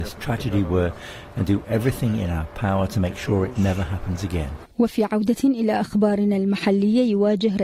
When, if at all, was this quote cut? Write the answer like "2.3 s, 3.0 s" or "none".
4.7 s